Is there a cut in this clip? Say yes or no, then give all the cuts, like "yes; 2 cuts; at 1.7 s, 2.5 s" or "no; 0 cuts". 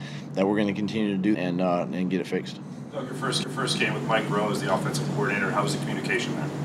yes; 2 cuts; at 1.3 s, 3.4 s